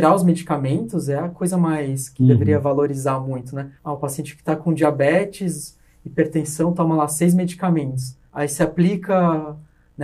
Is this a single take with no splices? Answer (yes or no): no